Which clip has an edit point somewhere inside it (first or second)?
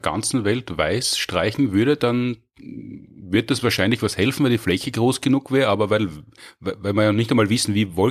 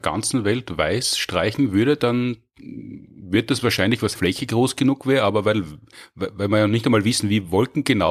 second